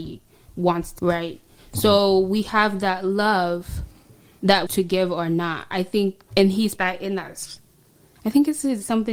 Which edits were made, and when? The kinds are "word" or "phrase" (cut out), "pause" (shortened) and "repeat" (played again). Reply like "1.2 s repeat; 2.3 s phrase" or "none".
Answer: 1.0 s phrase; 4.7 s phrase; 6.8 s word